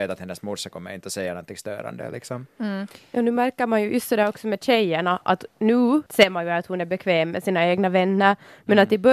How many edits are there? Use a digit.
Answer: 1